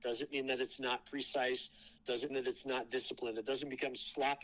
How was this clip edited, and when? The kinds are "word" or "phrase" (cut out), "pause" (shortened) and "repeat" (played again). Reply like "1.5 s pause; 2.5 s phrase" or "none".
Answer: 2.3 s word